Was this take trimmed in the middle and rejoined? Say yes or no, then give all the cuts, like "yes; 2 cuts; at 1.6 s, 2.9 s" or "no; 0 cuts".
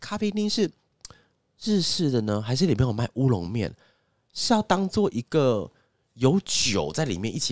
no; 0 cuts